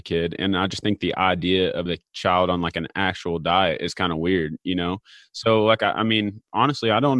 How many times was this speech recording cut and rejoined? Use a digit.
1